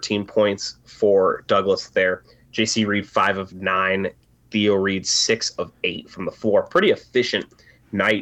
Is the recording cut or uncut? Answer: uncut